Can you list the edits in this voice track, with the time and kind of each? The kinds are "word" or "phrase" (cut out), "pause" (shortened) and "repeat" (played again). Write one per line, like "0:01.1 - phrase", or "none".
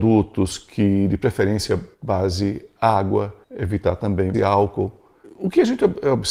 0:01.9 - pause
0:03.4 - pause
0:04.3 - word